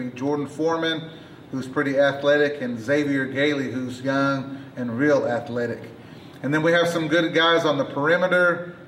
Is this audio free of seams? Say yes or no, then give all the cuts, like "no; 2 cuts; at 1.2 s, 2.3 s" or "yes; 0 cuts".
yes; 0 cuts